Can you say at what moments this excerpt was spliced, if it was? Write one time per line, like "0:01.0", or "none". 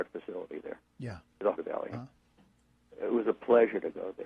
0:01.5
0:01.9

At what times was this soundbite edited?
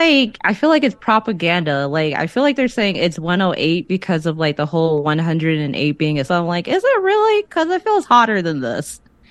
0:06.3

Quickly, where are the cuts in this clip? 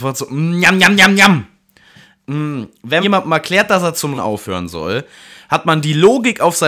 0:03.0
0:04.2

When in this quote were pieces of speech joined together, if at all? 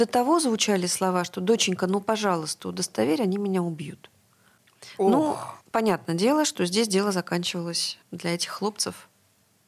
0:05.6
0:08.0

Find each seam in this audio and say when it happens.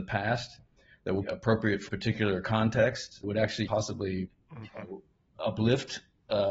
0:01.2
0:01.9
0:03.2
0:03.7
0:05.3

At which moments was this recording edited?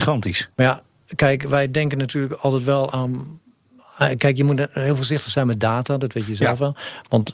none

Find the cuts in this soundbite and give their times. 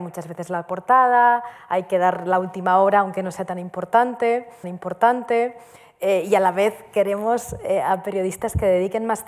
0:04.6

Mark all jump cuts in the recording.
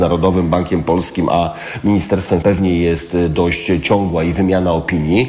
0:02.4

